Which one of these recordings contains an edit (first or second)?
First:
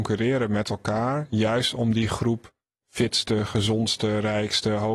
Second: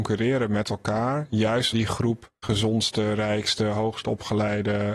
second